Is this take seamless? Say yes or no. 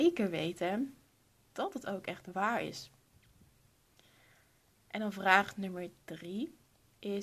yes